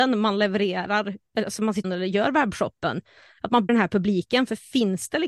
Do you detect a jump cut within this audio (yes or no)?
yes